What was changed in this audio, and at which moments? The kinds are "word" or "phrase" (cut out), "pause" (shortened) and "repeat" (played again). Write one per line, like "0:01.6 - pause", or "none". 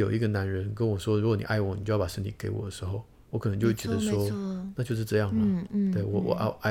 0:03.2 - pause

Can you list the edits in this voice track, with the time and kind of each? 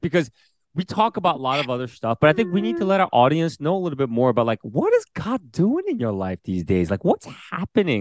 none

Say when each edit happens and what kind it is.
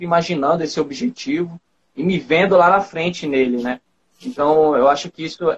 none

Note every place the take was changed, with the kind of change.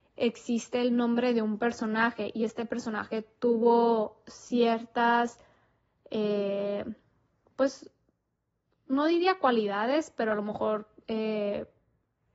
none

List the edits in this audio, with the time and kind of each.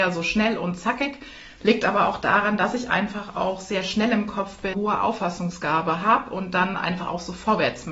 0:04.7 - word

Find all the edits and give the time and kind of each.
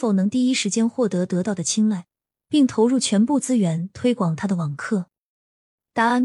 none

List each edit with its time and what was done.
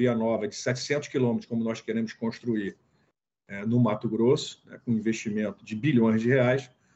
none

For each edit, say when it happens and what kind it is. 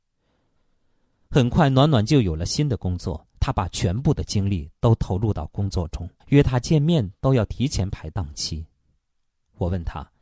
0:03.3 - pause
0:06.2 - pause

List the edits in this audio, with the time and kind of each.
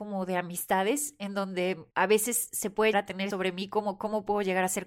0:02.9 - word
0:03.3 - word

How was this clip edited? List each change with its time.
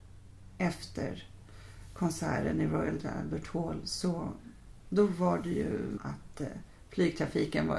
0:04.8 - pause
0:06.0 - phrase

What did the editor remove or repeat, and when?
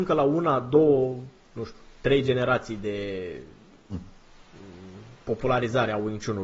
none

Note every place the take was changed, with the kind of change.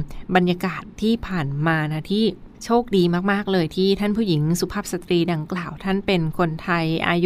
0:02.5 - pause

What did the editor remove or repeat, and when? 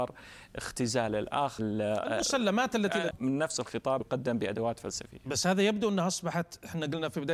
0:01.6 - word
0:03.1 - phrase
0:04.0 - word

